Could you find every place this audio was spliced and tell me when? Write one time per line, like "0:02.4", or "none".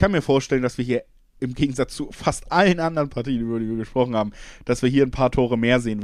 none